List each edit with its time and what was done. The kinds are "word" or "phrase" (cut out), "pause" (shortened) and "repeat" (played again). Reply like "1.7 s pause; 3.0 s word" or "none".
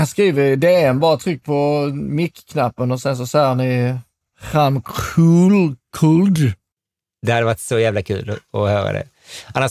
none